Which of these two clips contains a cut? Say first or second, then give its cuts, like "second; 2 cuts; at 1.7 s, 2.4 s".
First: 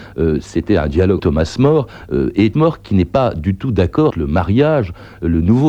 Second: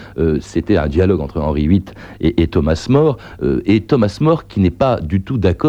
first; 3 cuts; at 1.2 s, 2.5 s, 4.1 s